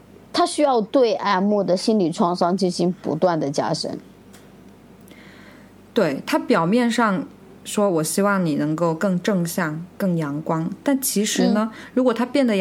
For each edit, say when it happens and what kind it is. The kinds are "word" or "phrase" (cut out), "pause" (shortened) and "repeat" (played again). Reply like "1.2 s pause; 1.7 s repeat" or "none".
none